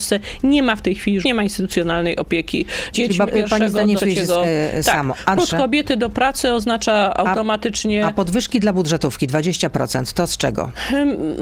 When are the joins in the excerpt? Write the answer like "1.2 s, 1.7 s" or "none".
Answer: 1.2 s, 2.9 s, 3.3 s, 4.0 s, 5.4 s